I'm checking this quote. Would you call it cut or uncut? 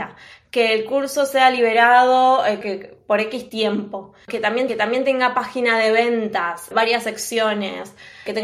cut